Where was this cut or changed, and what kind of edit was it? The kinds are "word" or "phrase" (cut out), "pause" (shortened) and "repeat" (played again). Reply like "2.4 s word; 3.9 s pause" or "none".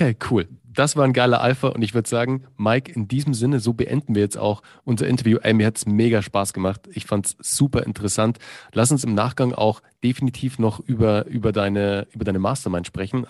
none